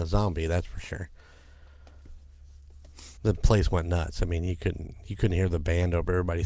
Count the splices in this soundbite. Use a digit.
1